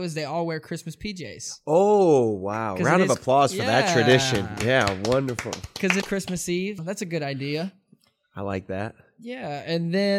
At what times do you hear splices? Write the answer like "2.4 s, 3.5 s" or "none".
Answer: 6.0 s, 6.8 s